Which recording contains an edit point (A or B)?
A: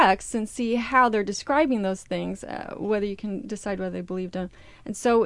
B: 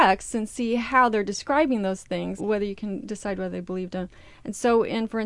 B